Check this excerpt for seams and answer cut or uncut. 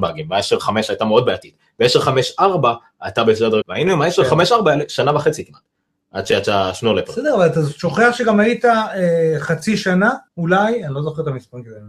cut